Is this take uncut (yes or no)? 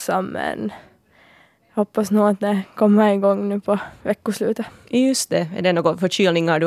yes